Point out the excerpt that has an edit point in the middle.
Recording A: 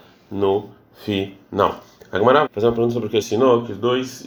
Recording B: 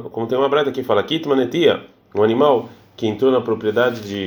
A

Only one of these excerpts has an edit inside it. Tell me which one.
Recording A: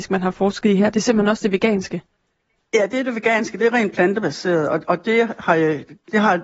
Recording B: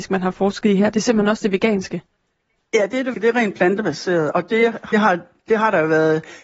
B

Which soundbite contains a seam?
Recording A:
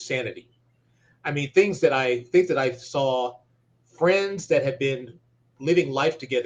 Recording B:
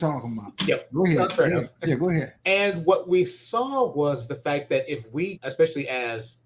B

